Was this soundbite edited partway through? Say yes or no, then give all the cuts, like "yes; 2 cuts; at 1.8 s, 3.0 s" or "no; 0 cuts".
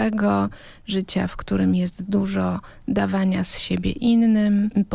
no; 0 cuts